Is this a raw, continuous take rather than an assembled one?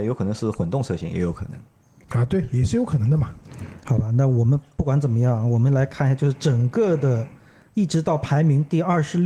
yes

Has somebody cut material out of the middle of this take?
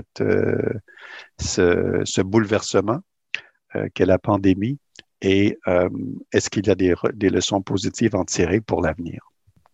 no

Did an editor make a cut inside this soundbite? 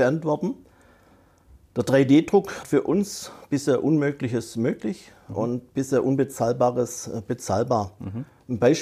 yes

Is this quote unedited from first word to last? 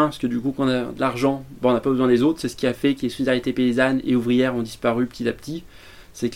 yes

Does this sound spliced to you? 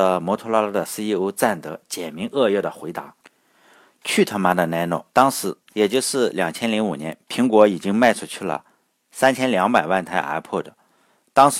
yes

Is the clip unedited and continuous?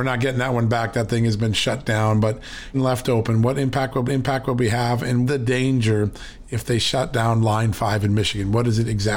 no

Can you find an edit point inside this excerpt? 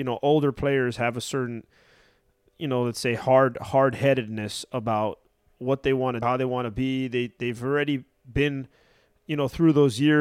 yes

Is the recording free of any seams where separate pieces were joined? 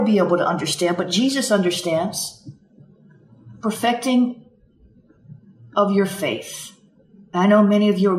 yes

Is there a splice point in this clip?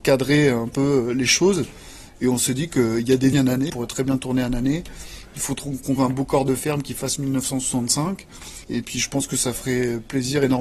yes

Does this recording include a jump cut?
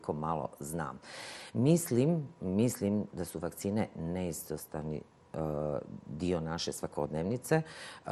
no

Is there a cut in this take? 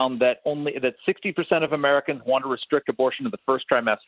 no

